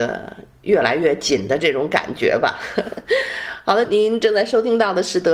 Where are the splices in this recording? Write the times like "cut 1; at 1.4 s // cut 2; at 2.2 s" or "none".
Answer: cut 1; at 3.8 s

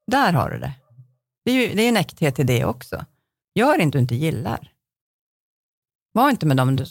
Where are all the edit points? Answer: cut 1; at 3.9 s

